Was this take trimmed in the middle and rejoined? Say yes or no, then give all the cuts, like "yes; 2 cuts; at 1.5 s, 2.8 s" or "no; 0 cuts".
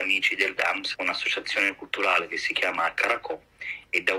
yes; 1 cut; at 0.9 s